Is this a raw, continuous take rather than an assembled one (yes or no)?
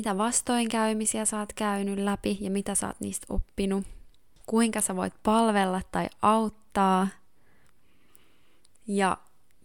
yes